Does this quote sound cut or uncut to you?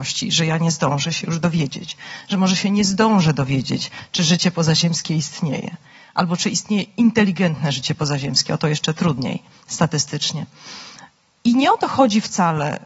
uncut